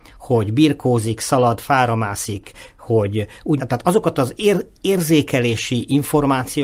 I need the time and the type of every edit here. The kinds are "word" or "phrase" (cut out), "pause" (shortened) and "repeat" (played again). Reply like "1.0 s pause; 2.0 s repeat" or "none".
3.6 s phrase